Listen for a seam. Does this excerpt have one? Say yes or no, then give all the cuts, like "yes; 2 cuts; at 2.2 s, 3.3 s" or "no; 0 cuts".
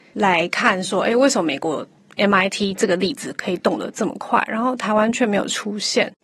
no; 0 cuts